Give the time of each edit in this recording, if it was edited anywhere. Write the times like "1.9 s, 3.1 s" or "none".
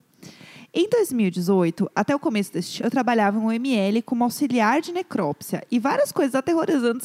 2.8 s